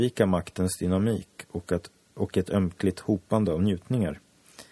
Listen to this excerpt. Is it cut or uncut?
uncut